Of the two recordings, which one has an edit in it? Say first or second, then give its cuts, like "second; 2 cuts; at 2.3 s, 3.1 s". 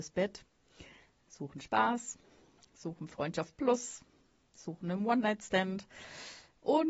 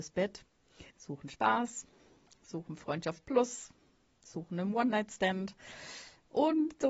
second; 1 cut; at 0.9 s